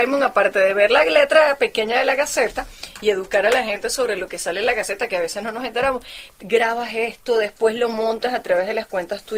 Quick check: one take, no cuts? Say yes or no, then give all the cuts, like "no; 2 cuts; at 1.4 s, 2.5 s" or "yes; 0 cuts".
yes; 0 cuts